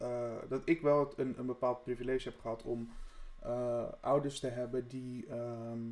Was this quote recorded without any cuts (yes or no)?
yes